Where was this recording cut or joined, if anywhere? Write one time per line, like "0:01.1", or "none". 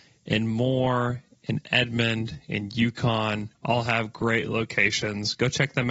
0:03.6

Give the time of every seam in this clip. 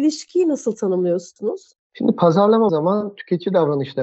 0:02.7

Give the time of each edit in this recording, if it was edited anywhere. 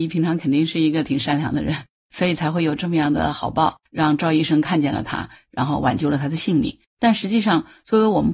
0:03.9
0:06.9

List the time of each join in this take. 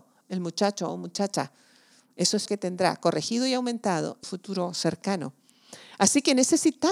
0:02.5
0:04.2

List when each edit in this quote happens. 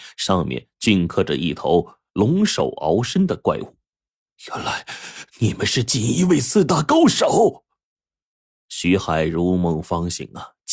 0:05.3

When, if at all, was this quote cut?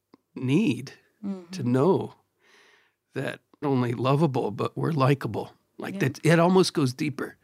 0:03.6

